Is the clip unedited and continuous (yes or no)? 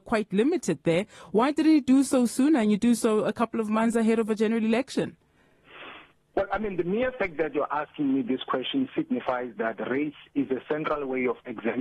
yes